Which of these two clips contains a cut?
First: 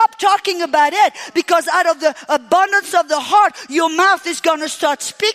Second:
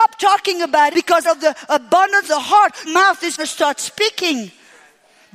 second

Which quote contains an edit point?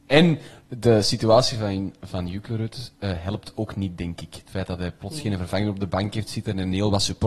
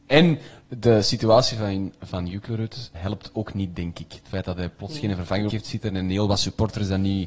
second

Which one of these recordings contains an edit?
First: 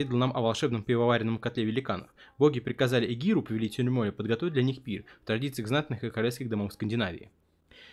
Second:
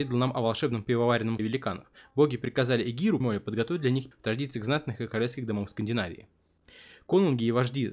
second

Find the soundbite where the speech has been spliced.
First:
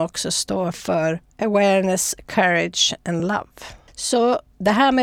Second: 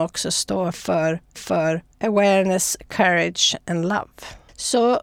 second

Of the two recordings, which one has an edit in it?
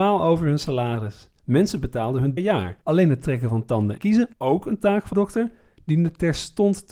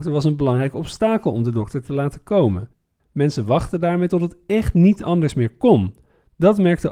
first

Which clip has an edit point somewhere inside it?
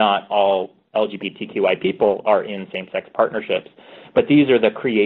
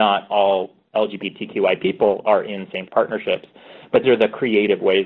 second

